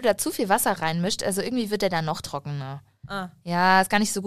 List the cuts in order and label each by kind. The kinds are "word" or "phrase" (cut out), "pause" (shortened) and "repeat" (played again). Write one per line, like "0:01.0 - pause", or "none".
none